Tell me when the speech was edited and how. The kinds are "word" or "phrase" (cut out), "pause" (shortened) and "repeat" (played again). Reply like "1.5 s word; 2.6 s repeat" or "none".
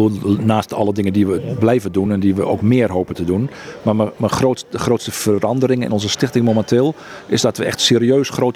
none

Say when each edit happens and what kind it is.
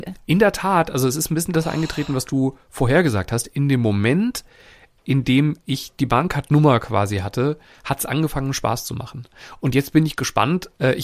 none

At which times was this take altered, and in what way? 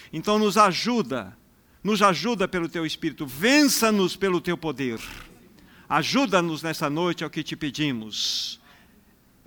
none

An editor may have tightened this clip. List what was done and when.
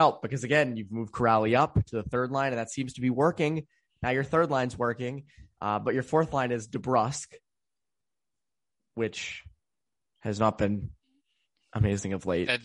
none

